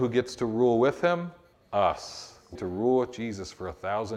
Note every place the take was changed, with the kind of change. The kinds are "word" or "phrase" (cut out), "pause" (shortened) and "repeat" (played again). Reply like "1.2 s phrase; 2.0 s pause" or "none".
1.5 s pause; 2.5 s word